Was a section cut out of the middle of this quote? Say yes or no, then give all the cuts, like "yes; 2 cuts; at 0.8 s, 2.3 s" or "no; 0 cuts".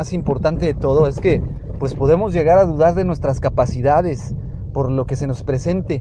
no; 0 cuts